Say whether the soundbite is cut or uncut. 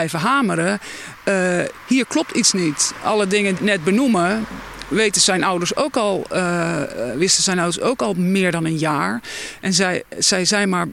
cut